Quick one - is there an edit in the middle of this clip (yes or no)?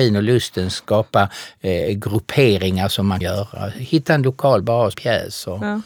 yes